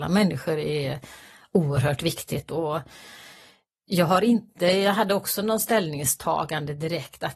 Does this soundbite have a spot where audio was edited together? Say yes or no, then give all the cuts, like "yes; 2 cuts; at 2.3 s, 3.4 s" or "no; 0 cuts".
no; 0 cuts